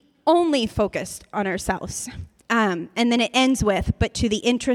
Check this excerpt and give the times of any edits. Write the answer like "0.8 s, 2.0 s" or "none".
2.4 s